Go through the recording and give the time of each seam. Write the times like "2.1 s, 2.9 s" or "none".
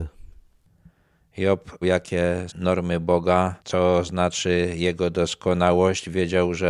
1.8 s, 2.5 s, 3.6 s